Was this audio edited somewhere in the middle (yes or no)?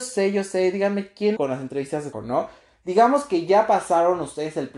yes